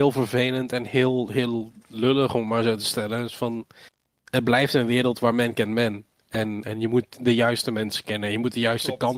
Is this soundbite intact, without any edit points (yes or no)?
yes